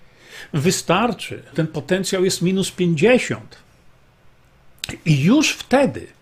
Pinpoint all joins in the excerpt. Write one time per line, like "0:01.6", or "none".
0:01.5